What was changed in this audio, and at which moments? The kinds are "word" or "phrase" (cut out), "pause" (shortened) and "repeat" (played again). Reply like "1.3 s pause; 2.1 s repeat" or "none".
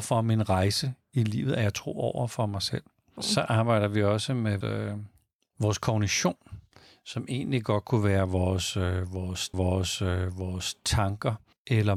4.6 s word; 9.5 s repeat